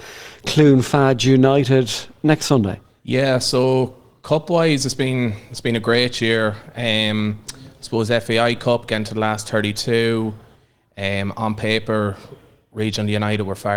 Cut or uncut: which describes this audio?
uncut